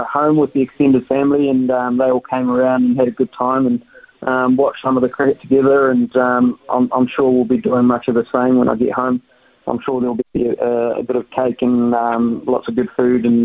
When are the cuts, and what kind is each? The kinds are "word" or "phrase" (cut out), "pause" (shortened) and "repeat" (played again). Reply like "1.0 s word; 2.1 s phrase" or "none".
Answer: none